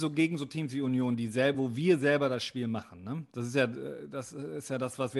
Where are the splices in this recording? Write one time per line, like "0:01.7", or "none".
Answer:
none

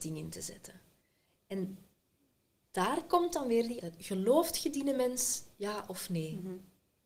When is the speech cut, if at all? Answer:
0:03.8

